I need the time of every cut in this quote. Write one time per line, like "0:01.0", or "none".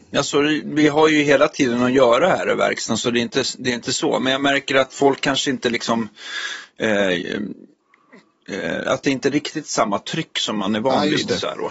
none